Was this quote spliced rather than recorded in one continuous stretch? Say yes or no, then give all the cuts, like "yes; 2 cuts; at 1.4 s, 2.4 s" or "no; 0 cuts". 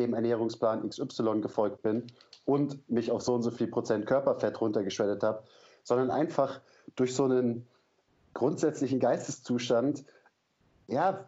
no; 0 cuts